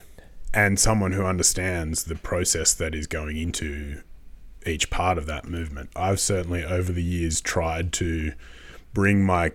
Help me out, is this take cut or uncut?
uncut